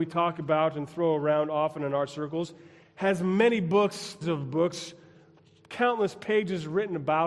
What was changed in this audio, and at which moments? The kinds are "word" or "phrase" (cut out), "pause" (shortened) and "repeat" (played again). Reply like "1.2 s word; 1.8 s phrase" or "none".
2.8 s pause; 4.2 s word